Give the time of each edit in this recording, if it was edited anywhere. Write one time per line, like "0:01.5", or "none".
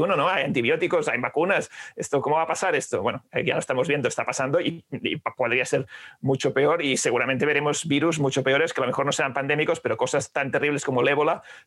0:02.2

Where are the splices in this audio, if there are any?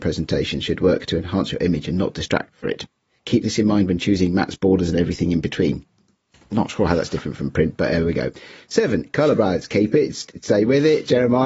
none

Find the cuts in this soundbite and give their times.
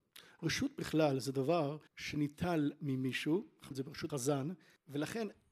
0:01.9
0:03.7
0:04.1

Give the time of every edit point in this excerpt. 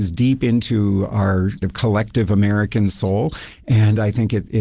0:01.6

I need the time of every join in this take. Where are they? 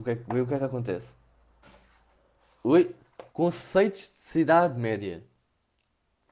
0:03.3

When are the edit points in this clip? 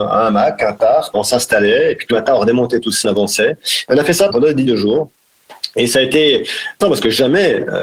0:01.1
0:02.1
0:03.0
0:04.3
0:04.6
0:06.8

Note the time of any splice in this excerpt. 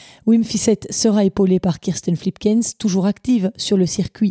none

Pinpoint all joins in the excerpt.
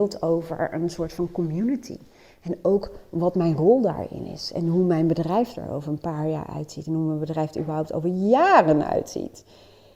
none

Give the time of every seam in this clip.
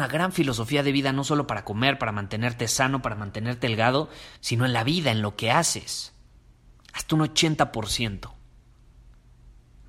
0:04.4

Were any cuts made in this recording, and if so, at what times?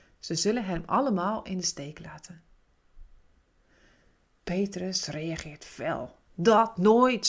none

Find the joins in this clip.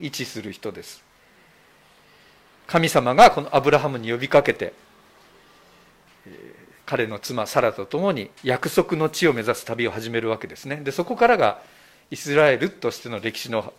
0:08.4

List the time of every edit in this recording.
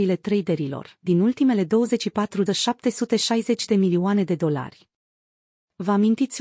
0:02.5

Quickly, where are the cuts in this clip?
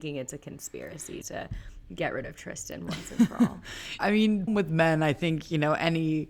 0:01.2
0:04.0
0:04.5

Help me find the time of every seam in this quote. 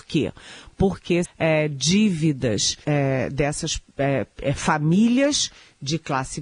0:01.2
0:02.8

